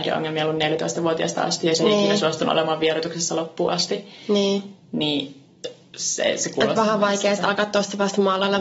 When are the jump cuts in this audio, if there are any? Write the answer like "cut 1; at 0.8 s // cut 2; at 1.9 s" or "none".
none